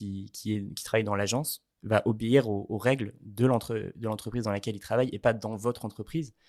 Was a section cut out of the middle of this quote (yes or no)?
yes